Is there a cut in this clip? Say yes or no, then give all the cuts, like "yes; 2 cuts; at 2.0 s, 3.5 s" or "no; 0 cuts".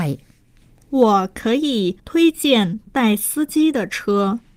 yes; 1 cut; at 2.0 s